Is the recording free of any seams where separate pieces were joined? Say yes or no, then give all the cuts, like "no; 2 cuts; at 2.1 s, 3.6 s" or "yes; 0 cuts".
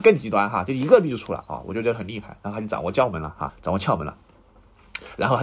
no; 1 cut; at 3.5 s